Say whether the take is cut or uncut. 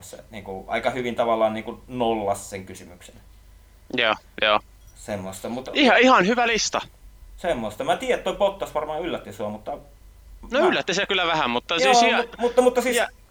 uncut